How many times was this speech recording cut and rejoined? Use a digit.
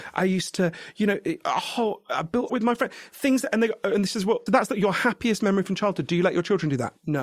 2